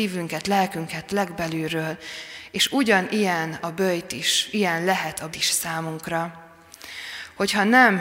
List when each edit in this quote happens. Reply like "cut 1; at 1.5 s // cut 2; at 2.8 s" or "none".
cut 1; at 4.5 s // cut 2; at 5.3 s

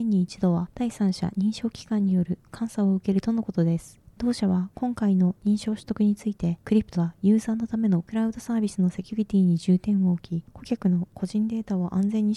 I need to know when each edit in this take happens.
cut 1; at 6.9 s

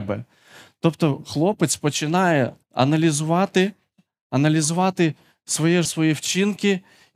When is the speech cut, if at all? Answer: cut 1; at 2.6 s // cut 2; at 5.8 s

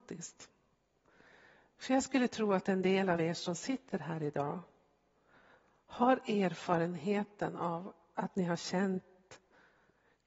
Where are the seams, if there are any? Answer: none

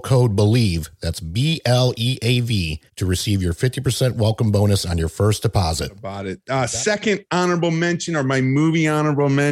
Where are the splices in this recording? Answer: cut 1; at 2.9 s

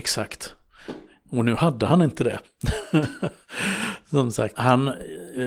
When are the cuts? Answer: cut 1; at 4.6 s

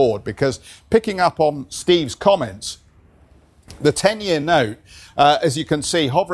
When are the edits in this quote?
none

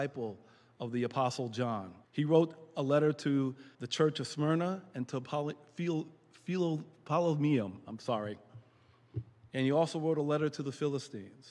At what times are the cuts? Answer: cut 1; at 2.0 s // cut 2; at 3.7 s // cut 3; at 9.5 s

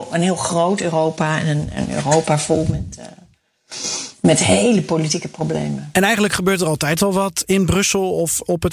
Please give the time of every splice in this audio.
none

